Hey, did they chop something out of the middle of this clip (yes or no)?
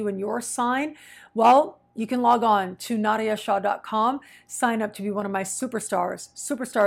no